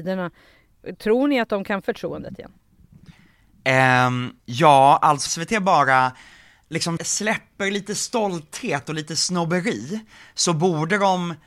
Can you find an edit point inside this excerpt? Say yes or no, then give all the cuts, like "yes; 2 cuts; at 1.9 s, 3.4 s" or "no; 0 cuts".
yes; 4 cuts; at 1.8 s, 4.4 s, 5.3 s, 7.0 s